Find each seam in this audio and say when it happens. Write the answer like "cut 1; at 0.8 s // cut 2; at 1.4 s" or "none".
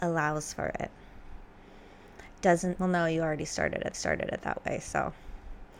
cut 1; at 2.7 s // cut 2; at 3.9 s